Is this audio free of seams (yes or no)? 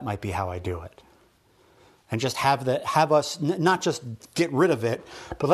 yes